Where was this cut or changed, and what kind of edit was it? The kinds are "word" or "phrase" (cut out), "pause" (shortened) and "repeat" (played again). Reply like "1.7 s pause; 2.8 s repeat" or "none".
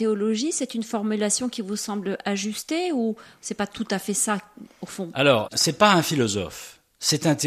none